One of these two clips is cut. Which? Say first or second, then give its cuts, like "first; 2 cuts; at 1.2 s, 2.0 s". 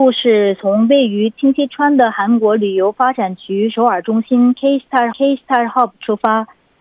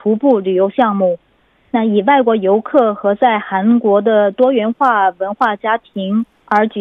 first; 1 cut; at 5.1 s